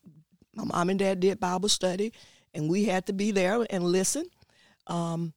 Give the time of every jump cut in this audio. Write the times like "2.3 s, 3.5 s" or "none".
none